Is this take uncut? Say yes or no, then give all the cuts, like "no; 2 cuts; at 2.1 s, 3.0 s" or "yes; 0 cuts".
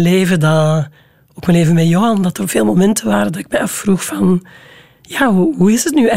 yes; 0 cuts